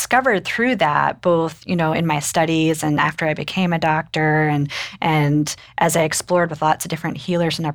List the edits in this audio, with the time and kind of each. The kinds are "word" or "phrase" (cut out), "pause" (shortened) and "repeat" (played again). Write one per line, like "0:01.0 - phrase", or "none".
none